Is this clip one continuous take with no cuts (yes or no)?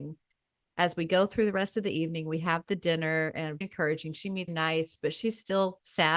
no